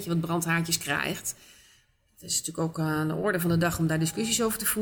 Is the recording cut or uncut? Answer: uncut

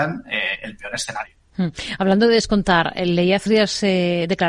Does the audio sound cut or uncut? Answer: cut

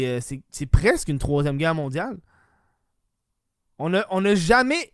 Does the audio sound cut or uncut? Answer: uncut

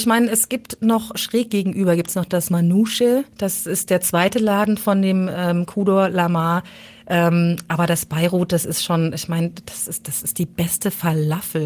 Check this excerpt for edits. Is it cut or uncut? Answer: cut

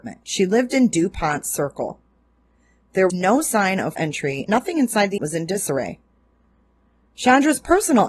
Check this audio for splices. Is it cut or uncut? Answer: cut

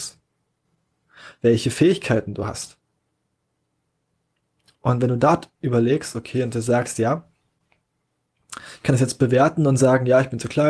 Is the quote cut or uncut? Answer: uncut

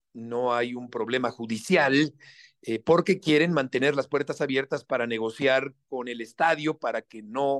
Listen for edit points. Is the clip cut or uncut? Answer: uncut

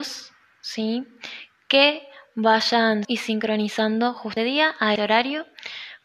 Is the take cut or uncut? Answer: cut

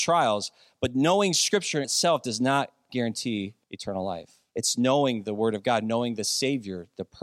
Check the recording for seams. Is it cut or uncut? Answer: cut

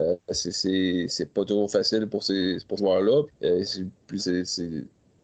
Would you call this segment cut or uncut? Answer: cut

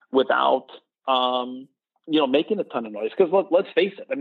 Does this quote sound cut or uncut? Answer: cut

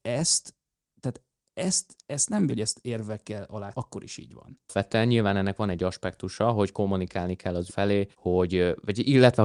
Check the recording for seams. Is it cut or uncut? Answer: cut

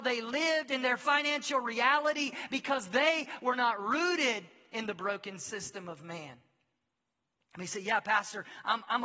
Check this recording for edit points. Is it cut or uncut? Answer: uncut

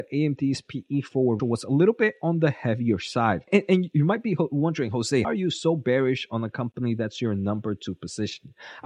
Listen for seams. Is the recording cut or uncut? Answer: cut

